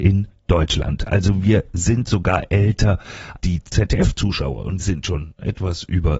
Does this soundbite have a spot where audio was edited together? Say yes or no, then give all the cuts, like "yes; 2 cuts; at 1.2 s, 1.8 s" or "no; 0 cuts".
yes; 3 cuts; at 3.4 s, 3.7 s, 4.8 s